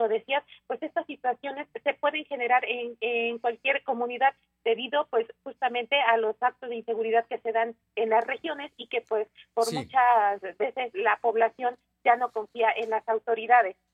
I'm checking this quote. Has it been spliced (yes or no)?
no